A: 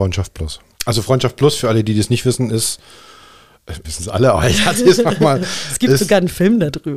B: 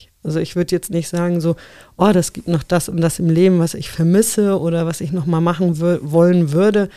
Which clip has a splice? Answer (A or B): A